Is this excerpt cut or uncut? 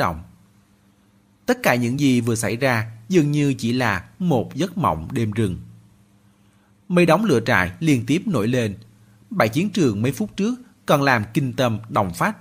uncut